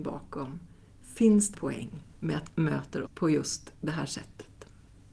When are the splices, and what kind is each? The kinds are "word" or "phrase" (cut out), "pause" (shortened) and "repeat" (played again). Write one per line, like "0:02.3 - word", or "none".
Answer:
0:01.5 - word
0:02.1 - pause
0:02.5 - word
0:03.0 - word